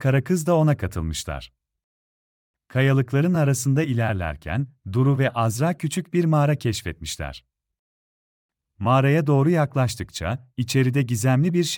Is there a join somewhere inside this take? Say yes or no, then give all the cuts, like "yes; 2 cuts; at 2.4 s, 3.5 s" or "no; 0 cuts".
no; 0 cuts